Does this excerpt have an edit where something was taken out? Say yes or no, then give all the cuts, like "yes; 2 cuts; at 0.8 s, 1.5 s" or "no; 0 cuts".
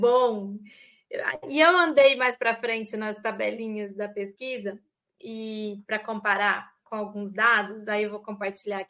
no; 0 cuts